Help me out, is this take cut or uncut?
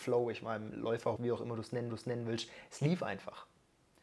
cut